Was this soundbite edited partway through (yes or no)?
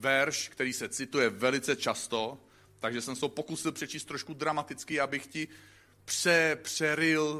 no